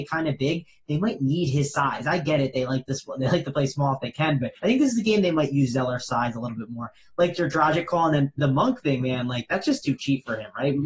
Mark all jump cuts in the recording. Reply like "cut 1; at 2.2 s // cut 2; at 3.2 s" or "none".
cut 1; at 4.6 s